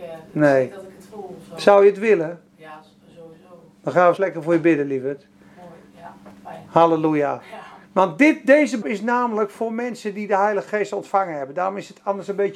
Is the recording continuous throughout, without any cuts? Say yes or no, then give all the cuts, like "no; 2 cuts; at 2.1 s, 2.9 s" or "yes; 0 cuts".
no; 4 cuts; at 2.5 s, 4.2 s, 7.8 s, 8.8 s